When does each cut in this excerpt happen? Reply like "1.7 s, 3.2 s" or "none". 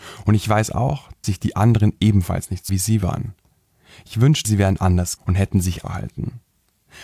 1.2 s, 2.7 s, 4.4 s, 5.2 s, 5.8 s